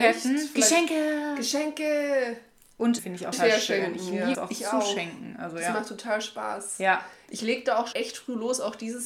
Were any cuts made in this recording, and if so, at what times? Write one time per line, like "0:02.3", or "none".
0:03.0
0:03.3
0:04.3
0:07.9